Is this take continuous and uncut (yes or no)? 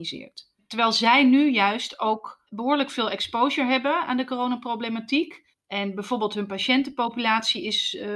yes